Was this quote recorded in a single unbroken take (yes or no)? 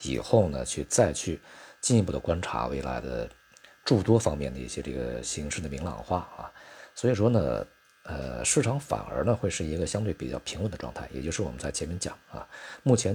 yes